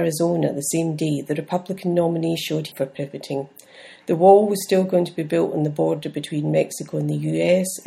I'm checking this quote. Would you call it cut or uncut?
cut